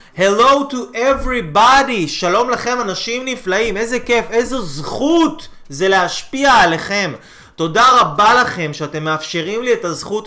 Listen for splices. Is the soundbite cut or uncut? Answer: uncut